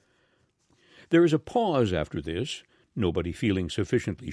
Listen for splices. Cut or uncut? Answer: uncut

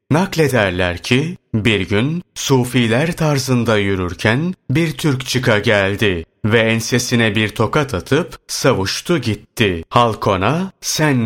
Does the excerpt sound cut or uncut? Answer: cut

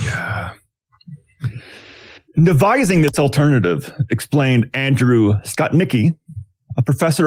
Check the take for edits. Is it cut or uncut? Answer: uncut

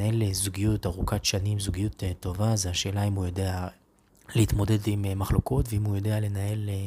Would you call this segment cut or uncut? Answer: cut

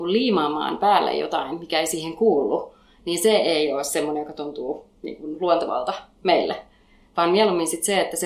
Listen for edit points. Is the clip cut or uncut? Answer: uncut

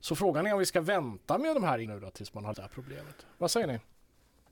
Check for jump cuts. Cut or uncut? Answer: cut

